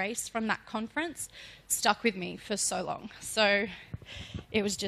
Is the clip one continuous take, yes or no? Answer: yes